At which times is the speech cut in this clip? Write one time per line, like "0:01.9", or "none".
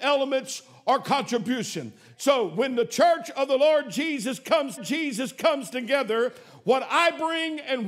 0:04.8